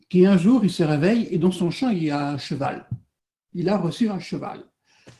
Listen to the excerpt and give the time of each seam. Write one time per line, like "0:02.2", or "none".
none

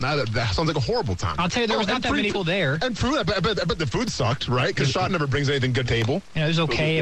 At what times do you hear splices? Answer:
0:02.3
0:03.0
0:05.1
0:05.8

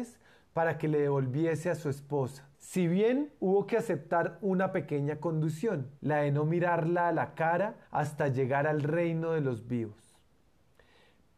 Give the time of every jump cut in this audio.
0:02.5
0:06.0
0:07.8

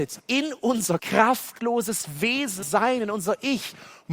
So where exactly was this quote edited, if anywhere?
0:01.0
0:02.6

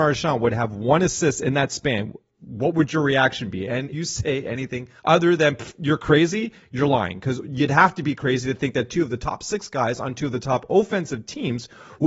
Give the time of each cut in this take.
0:03.9
0:05.0

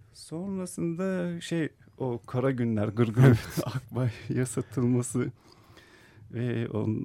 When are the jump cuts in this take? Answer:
none

